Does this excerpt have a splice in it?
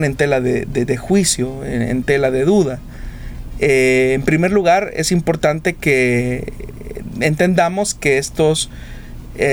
no; 0 cuts

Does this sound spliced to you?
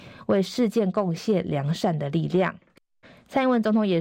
yes; 1 cut; at 3.0 s

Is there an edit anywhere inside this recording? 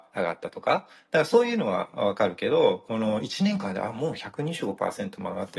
no; 0 cuts

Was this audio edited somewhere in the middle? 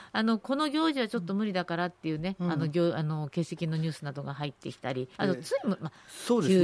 yes; 1 cut; at 5.1 s

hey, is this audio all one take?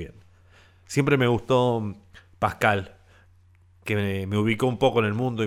yes; 0 cuts

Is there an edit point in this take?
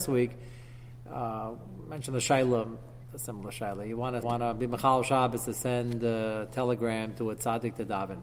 yes; 2 cuts; at 3.0 s, 4.2 s

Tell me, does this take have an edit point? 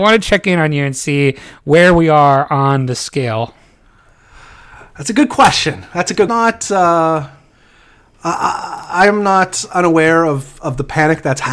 yes; 1 cut; at 6.3 s

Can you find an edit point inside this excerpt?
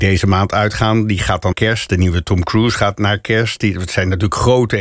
yes; 1 cut; at 1.5 s

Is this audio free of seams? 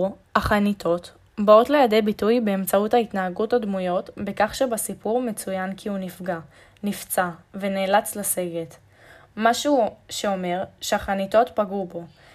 yes; 0 cuts

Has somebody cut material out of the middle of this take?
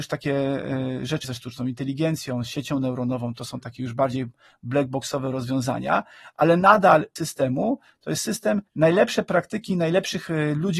yes; 3 cuts; at 1.2 s, 7.2 s, 8.7 s

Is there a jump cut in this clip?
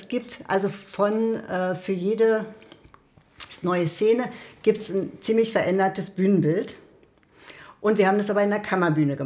no; 0 cuts

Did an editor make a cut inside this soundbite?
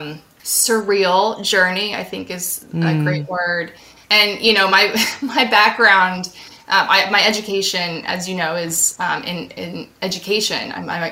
no; 0 cuts

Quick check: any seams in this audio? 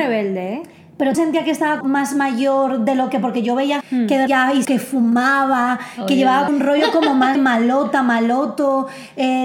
yes; 7 cuts; at 1.1 s, 1.8 s, 3.8 s, 4.3 s, 4.6 s, 6.5 s, 7.3 s

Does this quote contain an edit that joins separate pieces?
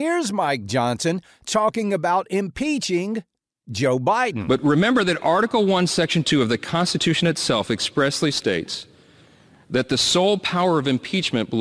no; 0 cuts

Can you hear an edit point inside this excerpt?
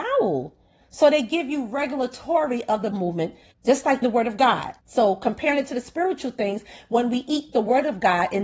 yes; 4 cuts; at 2.9 s, 3.5 s, 4.0 s, 4.8 s

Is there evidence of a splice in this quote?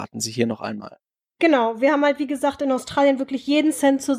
no; 0 cuts

